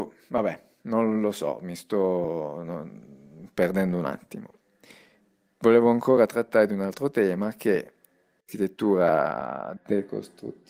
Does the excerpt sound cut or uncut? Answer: uncut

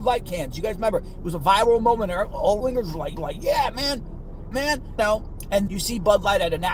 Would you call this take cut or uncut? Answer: cut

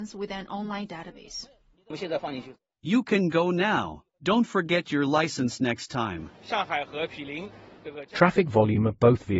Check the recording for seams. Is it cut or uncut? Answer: cut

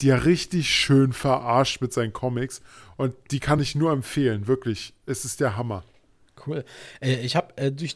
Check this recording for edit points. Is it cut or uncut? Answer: uncut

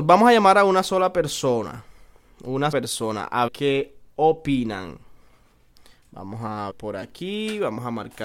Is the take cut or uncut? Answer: cut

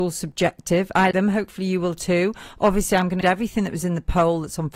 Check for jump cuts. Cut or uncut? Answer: cut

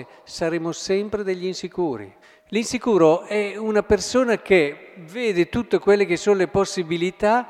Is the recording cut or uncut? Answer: cut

